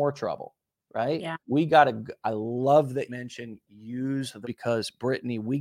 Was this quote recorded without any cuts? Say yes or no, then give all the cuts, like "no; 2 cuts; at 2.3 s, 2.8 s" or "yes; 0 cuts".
no; 3 cuts; at 1.4 s, 3.1 s, 4.4 s